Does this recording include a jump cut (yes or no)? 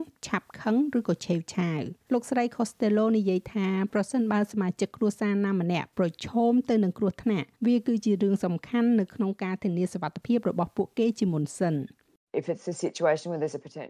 yes